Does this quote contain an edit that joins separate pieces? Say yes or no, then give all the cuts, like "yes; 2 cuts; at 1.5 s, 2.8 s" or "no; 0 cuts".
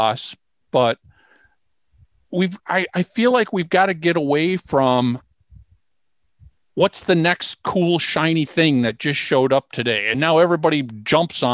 no; 0 cuts